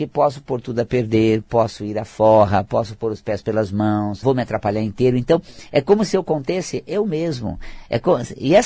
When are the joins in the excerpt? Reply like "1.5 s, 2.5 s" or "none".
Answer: 4.2 s